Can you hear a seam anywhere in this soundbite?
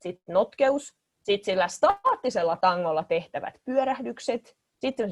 no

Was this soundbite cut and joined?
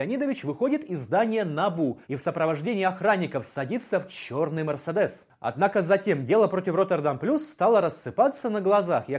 yes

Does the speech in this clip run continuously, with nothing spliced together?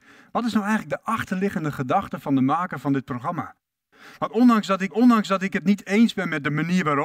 no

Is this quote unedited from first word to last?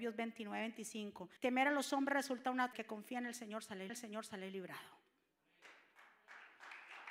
no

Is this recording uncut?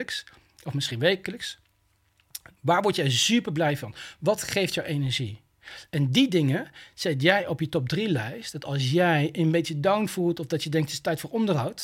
yes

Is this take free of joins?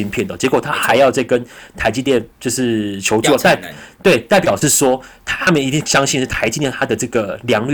no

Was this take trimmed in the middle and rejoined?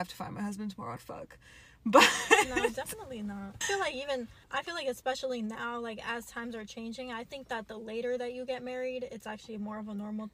yes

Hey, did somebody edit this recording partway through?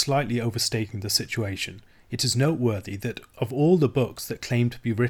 no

